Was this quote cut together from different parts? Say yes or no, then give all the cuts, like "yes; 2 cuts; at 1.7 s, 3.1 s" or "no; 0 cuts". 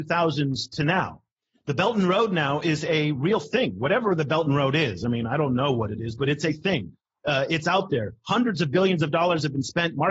no; 0 cuts